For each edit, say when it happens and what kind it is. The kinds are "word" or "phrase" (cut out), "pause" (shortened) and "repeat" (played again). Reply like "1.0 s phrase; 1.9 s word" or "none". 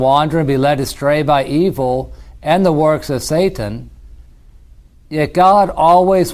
none